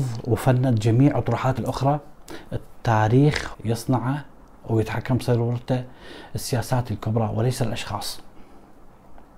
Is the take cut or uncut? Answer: cut